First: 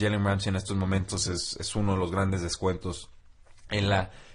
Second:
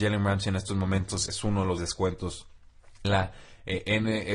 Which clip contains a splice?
second; 3 cuts; at 1.3 s, 1.8 s, 3.0 s

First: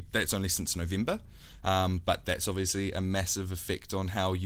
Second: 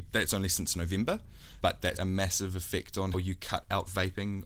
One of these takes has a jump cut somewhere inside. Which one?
second; 3 cuts; at 1.6 s, 2.0 s, 3.1 s

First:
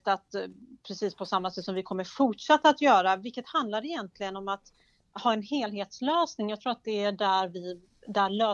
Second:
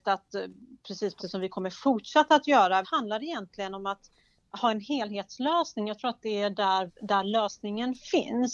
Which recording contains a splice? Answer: second; 3 cuts; at 1.2 s, 2.8 s, 6.9 s

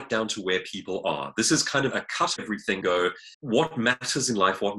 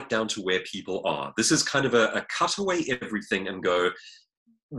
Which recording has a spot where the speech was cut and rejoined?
first; 4 cuts; at 1.9 s, 2.4 s, 2.8 s, 3.3 s

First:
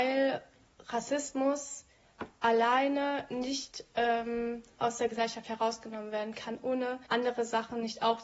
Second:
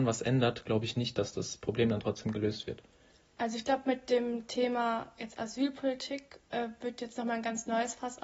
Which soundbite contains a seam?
first; 1 cut; at 7.1 s

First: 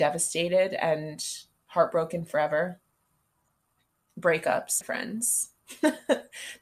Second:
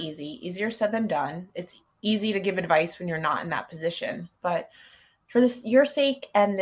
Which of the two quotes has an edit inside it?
first; 2 cuts; at 1.6 s, 4.8 s

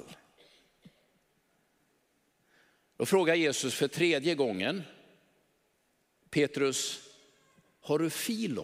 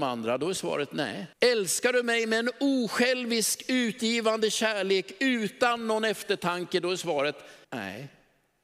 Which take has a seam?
second; 2 cuts; at 1.3 s, 7.6 s

